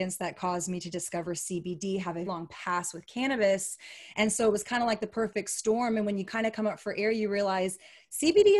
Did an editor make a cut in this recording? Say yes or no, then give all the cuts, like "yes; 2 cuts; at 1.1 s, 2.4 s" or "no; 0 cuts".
yes; 1 cut; at 2.3 s